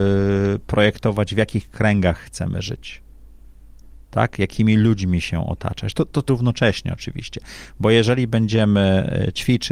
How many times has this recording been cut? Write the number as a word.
one